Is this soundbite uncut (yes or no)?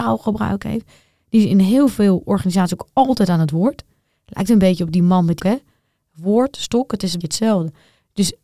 no